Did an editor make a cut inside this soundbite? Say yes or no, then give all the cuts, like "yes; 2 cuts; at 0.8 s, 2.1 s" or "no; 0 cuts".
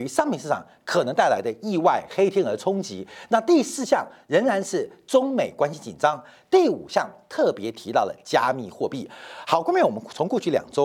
no; 0 cuts